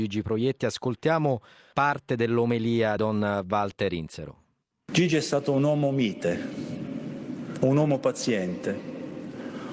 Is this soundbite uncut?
no; 2 cuts; at 1.7 s, 3.0 s

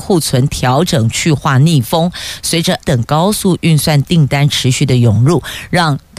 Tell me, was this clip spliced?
yes; 1 cut; at 2.8 s

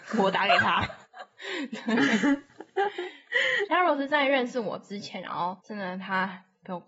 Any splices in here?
yes; 3 cuts; at 1.0 s, 3.7 s, 5.6 s

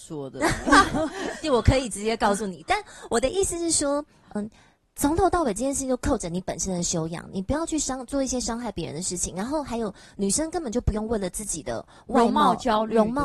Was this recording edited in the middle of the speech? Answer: yes; 2 cuts; at 1.4 s, 4.4 s

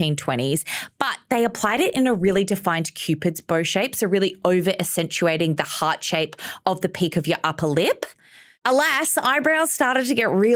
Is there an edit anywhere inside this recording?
no; 0 cuts

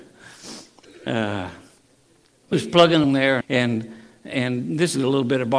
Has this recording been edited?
yes; 3 cuts; at 2.5 s, 3.0 s, 3.4 s

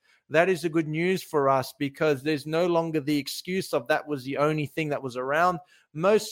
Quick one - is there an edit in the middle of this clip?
no; 0 cuts

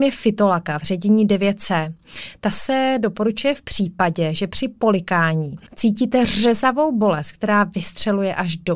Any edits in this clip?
yes; 1 cut; at 5.7 s

